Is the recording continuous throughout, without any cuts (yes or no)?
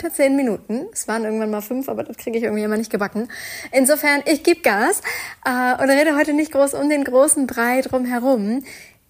yes